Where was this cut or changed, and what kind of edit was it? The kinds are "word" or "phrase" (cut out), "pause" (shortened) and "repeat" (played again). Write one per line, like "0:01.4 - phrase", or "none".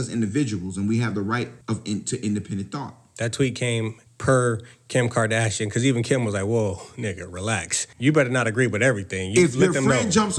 0:01.6 - pause
0:04.1 - pause
0:07.9 - pause